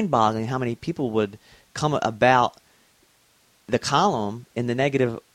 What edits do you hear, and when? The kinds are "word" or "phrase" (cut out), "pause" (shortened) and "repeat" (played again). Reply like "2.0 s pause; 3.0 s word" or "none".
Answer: none

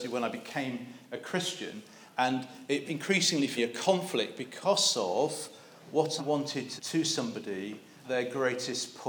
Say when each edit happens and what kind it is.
2.8 s word; 3.6 s word; 6.2 s word; 6.8 s word; 8.0 s word

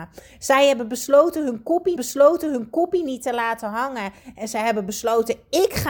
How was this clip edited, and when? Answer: 2.0 s repeat

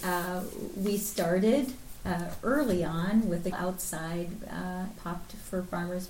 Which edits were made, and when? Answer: 3.5 s word; 5.0 s word

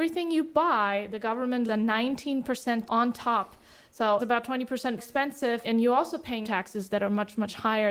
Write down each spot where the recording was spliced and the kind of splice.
1.7 s word; 2.9 s word; 4.2 s word; 5.0 s word; 5.6 s word; 6.4 s word

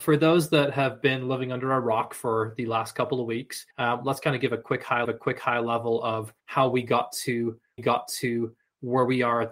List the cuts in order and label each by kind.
3.7 s pause; 5.0 s repeat; 6.4 s pause; 7.8 s repeat

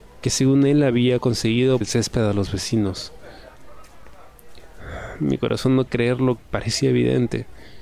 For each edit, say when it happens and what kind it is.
1.8 s word; 5.9 s word; 6.4 s word

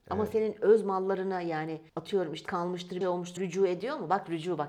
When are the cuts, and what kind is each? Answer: 1.9 s pause; 2.5 s word; 3.0 s word; 3.4 s word

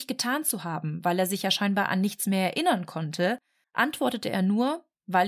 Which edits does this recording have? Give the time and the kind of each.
3.6 s pause

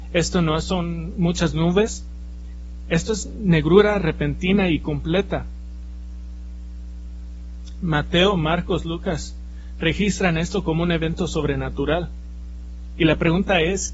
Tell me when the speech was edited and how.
none

